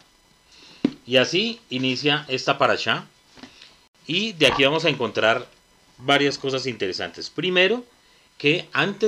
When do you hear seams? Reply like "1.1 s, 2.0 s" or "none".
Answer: none